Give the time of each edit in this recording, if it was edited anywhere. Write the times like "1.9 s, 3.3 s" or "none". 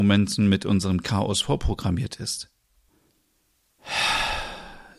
1.0 s